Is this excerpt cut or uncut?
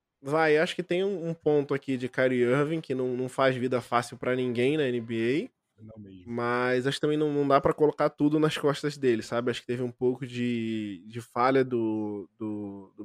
uncut